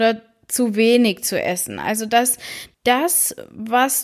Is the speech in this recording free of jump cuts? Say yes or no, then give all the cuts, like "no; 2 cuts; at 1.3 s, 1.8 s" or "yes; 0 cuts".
no; 1 cut; at 2.7 s